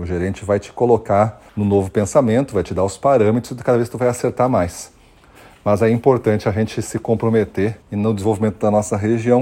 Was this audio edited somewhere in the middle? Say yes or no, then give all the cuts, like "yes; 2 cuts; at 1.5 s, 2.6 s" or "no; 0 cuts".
yes; 2 cuts; at 1.5 s, 7.8 s